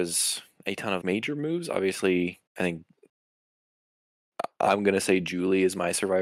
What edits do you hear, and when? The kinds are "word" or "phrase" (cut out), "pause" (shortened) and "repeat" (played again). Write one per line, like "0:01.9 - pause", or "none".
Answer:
0:01.0 - word
0:02.5 - pause

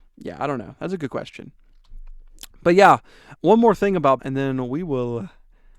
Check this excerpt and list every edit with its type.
0:03.4 - word
0:04.2 - word

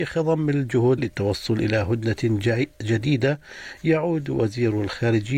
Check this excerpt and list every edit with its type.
0:01.0 - word

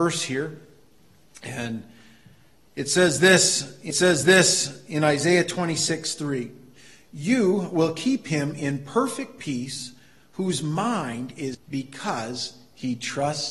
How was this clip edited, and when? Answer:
0:03.9 - repeat
0:11.5 - phrase

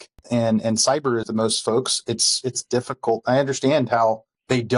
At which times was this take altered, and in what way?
0:01.2 - phrase

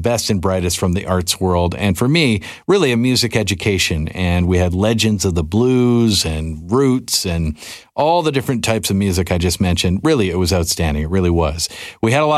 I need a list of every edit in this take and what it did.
none

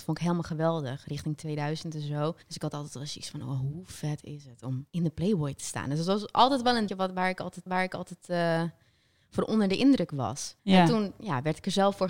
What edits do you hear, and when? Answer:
0:02.4 - pause
0:04.9 - pause
0:06.9 - word
0:07.7 - repeat
0:10.6 - pause

